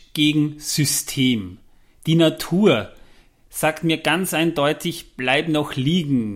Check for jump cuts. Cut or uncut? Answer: uncut